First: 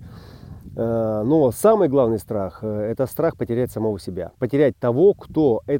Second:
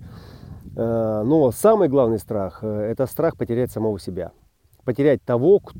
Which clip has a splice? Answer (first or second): first